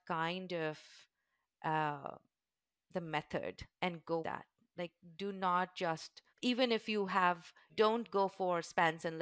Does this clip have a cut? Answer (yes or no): yes